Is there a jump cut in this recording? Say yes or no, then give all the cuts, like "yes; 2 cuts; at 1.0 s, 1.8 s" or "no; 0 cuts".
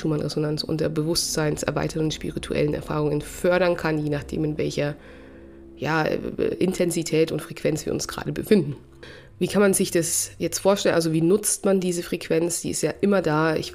no; 0 cuts